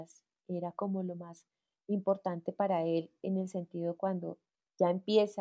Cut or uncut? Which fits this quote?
uncut